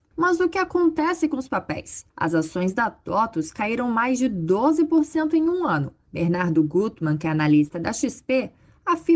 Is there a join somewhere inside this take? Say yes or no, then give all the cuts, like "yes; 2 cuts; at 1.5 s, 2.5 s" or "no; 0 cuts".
yes; 1 cut; at 2.1 s